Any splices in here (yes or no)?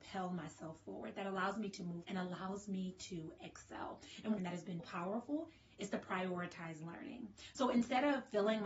yes